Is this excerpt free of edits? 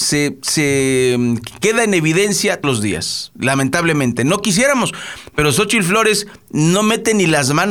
no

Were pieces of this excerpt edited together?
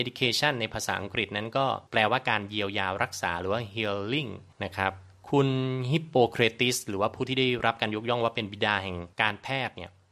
yes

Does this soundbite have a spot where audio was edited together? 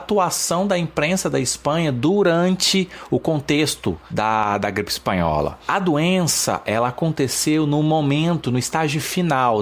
no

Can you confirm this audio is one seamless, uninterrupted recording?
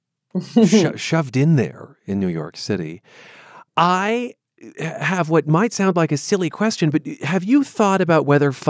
yes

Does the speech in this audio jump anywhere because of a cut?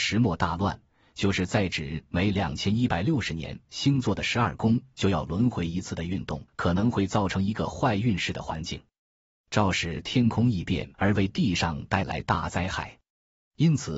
yes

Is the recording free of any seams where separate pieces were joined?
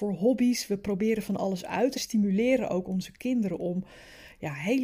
no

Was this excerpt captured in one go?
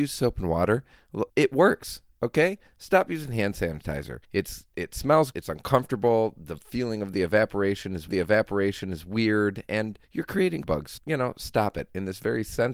no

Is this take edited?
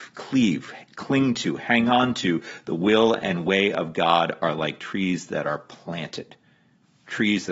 no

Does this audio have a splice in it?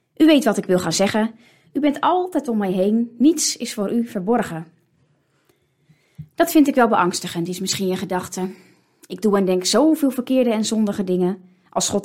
no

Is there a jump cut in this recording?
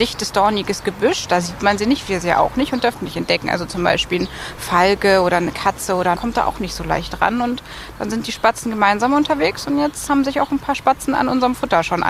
yes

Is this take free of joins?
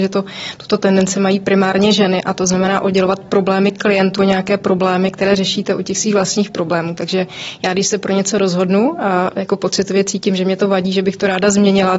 no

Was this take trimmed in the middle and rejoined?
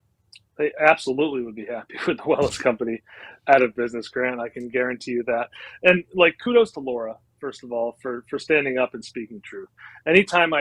no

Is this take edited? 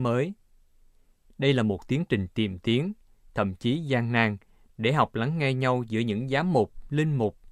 no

